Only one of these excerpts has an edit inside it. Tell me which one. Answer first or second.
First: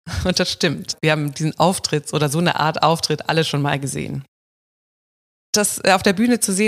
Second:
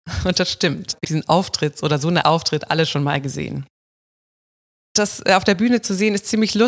second